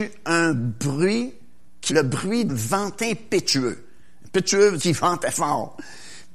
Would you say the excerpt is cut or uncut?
cut